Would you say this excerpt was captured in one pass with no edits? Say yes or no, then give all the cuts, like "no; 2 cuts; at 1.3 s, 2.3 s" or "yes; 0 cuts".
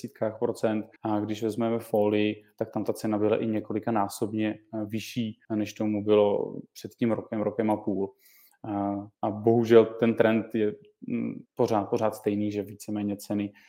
no; 4 cuts; at 1.0 s, 5.4 s, 9.1 s, 11.5 s